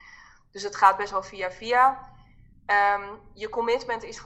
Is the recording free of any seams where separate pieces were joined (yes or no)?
yes